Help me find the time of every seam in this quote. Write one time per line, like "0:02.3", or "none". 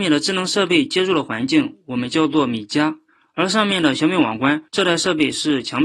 0:03.1
0:04.7